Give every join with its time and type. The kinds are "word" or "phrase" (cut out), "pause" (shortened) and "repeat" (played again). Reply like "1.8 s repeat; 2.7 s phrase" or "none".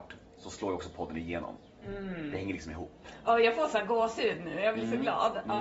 none